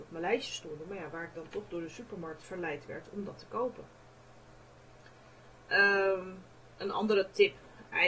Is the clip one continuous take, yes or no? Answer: no